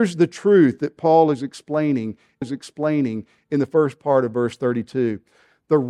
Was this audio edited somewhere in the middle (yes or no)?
yes